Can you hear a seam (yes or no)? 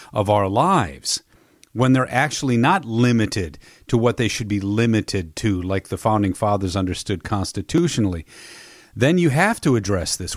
no